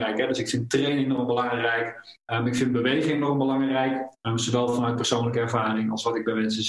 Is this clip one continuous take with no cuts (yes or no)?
yes